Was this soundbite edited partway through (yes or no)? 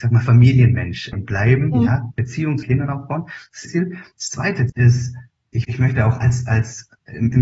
yes